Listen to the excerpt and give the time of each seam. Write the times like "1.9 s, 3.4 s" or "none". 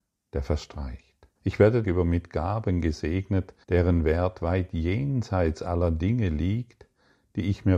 1.4 s, 1.8 s, 3.6 s